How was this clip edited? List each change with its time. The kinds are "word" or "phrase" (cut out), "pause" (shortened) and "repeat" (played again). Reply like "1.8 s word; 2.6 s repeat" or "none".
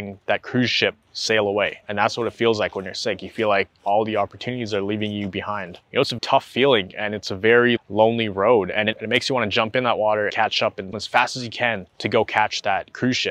1.0 s pause; 1.8 s pause; 3.7 s pause; 5.8 s pause; 6.2 s word; 7.8 s word; 10.3 s word; 10.9 s word; 11.9 s pause